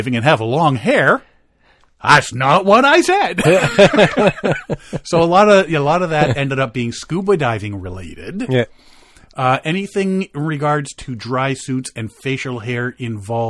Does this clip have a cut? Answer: no; 0 cuts

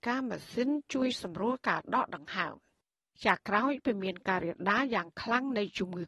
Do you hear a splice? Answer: no; 0 cuts

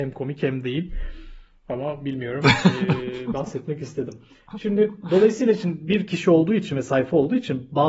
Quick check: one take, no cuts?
yes; 0 cuts

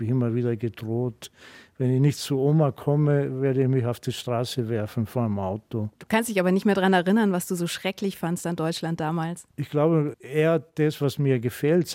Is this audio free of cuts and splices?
no; 2 cuts; at 5.9 s, 9.5 s

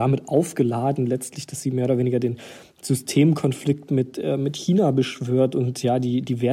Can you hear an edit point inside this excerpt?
no; 0 cuts

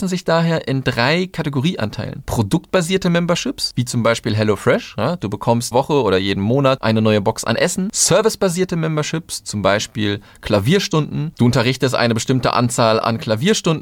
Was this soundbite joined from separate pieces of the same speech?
yes; 1 cut; at 5.7 s

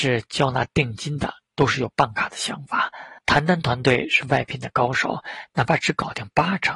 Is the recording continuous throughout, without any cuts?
no; 1 cut; at 3.2 s

